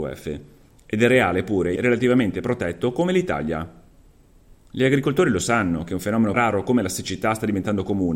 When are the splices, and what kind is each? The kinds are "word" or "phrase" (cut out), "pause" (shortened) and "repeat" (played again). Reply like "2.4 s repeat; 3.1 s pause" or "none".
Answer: 1.8 s phrase; 6.3 s word